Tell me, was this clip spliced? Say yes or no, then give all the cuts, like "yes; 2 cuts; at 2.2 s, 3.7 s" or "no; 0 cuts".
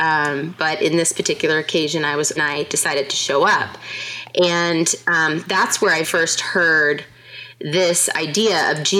yes; 2 cuts; at 2.4 s, 6.0 s